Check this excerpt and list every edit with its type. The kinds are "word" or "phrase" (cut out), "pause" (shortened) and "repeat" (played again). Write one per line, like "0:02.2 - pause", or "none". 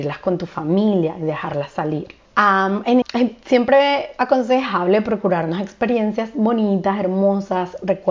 0:02.3 - pause
0:03.0 - phrase